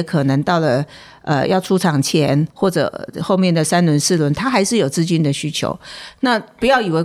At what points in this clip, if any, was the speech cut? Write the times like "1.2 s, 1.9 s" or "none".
2.5 s